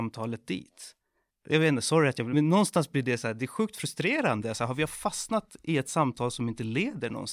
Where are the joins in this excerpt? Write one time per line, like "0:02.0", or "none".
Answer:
0:01.3
0:02.3